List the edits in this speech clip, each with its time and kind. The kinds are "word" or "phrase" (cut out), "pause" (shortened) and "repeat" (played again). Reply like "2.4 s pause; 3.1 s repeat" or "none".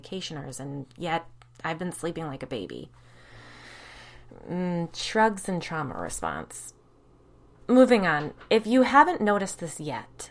none